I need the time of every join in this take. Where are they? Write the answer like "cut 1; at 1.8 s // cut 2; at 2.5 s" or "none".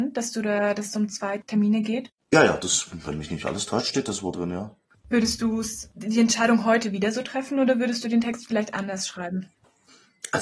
none